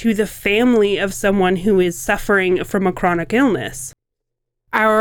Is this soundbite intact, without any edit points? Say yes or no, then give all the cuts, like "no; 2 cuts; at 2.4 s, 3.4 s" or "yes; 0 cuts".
yes; 0 cuts